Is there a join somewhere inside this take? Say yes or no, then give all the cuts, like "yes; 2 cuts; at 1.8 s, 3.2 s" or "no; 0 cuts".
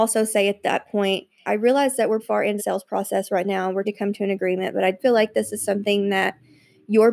yes; 5 cuts; at 1.5 s, 2.2 s, 2.6 s, 3.8 s, 5.0 s